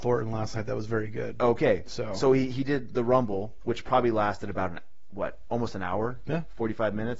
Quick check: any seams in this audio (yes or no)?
no